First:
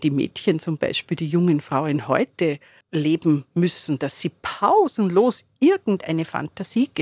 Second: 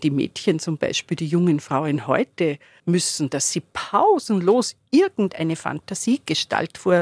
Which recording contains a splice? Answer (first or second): second